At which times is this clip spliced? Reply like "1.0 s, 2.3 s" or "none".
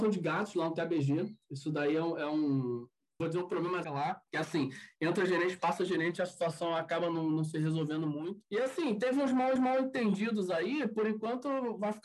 3.2 s, 3.8 s, 4.3 s, 8.4 s, 9.6 s